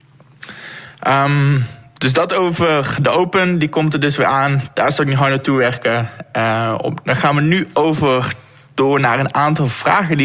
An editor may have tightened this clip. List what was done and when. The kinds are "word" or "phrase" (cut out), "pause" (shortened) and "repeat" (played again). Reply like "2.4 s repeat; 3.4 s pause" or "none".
none